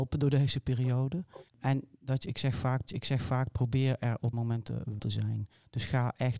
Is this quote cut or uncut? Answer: cut